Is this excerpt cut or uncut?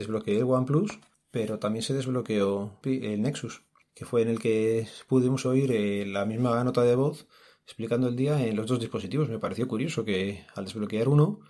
uncut